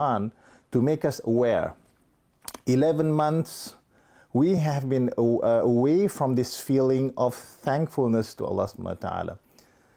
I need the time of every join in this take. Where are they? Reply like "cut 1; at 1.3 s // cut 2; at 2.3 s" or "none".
none

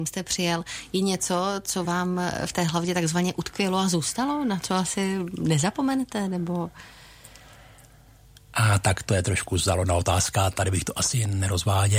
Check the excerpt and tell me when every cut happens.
none

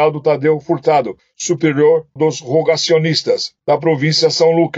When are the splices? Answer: cut 1; at 2.2 s

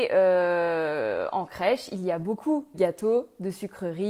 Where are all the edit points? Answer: cut 1; at 2.7 s

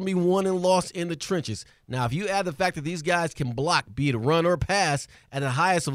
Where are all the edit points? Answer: none

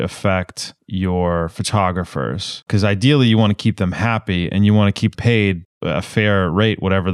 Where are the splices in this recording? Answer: cut 1; at 5.1 s

